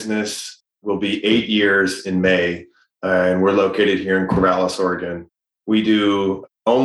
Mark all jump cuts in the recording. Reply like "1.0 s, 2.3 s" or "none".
none